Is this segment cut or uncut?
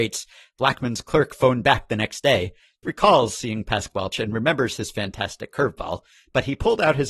cut